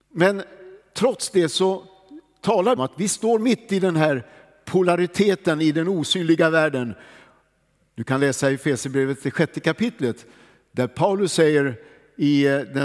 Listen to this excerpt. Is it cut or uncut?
cut